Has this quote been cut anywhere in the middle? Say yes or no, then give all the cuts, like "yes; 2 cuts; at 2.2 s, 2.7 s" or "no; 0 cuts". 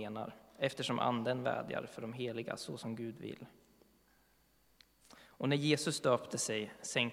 no; 0 cuts